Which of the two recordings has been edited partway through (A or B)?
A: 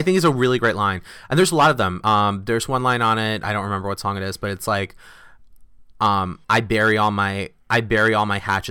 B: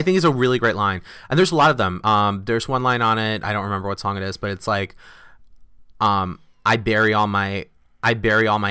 A